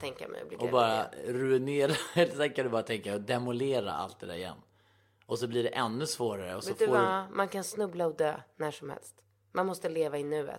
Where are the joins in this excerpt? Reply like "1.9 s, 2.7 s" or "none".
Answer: none